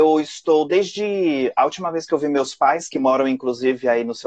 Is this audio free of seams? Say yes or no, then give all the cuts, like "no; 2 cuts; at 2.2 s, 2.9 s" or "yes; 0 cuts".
yes; 0 cuts